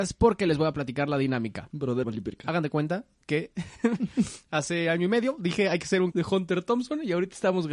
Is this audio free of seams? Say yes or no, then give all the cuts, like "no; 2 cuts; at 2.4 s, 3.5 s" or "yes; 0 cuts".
no; 2 cuts; at 2.0 s, 6.1 s